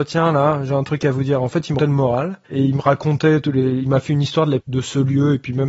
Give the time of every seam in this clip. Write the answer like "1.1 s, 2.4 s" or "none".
1.8 s, 2.4 s, 4.6 s